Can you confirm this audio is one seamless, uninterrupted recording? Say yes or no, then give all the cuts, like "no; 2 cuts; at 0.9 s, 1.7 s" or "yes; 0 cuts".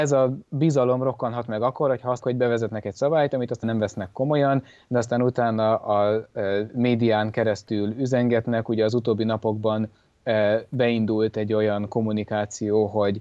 no; 2 cuts; at 2.2 s, 3.6 s